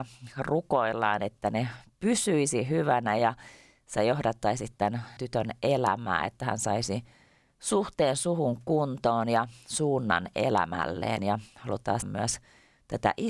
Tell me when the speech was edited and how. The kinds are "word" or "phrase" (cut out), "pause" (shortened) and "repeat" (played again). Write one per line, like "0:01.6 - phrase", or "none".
0:05.2 - word
0:12.0 - word